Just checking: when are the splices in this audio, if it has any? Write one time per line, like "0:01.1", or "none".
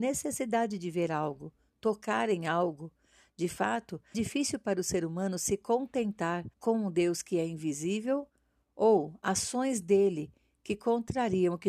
0:04.1
0:06.5